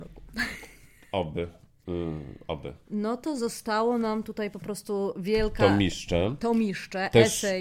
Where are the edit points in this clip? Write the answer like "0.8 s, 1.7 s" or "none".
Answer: 2.8 s